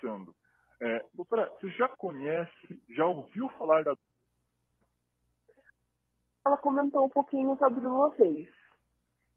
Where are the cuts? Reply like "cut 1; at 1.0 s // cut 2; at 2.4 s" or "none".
none